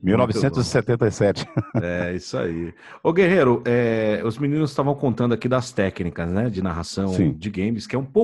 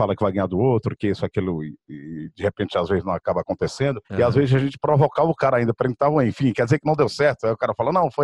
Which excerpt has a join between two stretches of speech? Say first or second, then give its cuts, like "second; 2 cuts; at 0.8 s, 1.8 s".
second; 1 cut; at 4.0 s